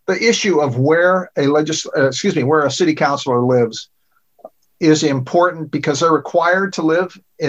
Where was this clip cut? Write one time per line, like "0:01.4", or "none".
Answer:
none